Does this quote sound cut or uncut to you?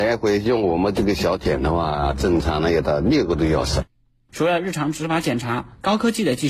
uncut